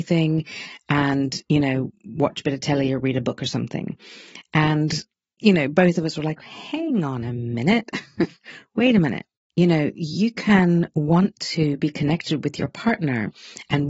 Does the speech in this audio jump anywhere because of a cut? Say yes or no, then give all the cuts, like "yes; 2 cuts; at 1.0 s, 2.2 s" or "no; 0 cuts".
no; 0 cuts